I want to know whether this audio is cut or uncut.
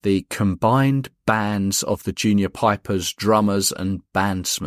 uncut